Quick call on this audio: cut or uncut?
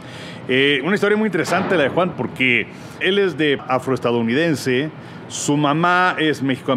cut